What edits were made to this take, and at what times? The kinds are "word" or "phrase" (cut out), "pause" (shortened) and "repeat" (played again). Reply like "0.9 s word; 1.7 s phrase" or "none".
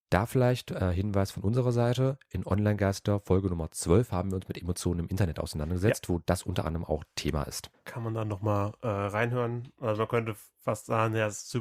none